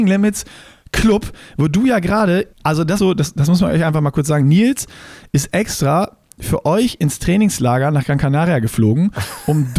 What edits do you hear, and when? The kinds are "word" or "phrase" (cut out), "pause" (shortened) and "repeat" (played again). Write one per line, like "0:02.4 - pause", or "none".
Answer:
0:02.5 - pause
0:03.0 - word